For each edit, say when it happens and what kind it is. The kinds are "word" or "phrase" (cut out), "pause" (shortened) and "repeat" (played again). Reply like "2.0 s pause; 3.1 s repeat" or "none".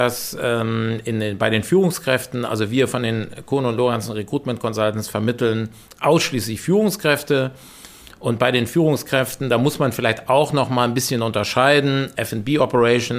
none

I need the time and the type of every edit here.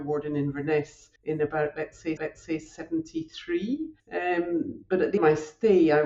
1.2 s pause; 2.2 s repeat; 4.0 s pause; 5.2 s phrase

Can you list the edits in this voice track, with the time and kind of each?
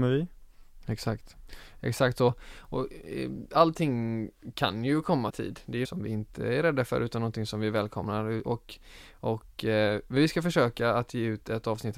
5.3 s phrase; 5.8 s word

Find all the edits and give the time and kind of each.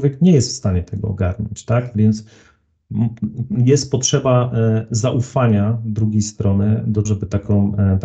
7.1 s word

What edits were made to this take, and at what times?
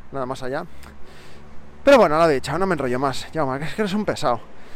none

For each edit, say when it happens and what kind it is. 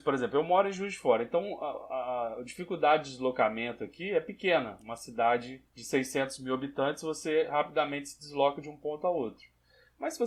5.7 s pause

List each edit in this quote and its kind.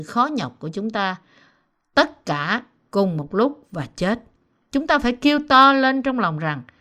none

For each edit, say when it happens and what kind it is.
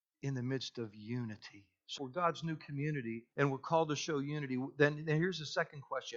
2.0 s phrase; 3.3 s pause

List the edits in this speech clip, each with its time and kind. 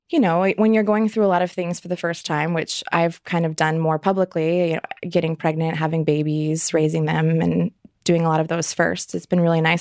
none

